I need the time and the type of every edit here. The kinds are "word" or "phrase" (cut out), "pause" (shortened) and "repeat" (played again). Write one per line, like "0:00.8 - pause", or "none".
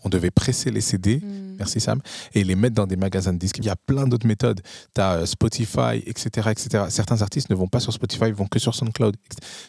0:03.6 - phrase